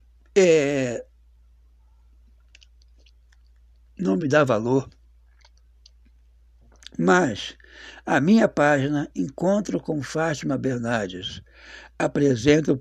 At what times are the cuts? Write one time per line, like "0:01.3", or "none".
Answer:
none